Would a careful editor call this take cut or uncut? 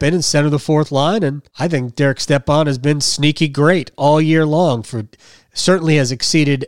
cut